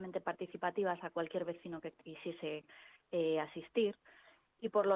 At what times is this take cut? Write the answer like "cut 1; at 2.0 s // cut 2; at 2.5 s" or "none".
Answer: none